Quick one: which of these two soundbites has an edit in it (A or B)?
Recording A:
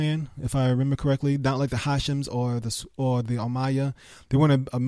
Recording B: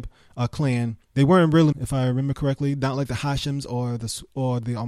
B